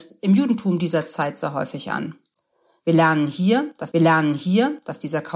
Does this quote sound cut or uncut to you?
cut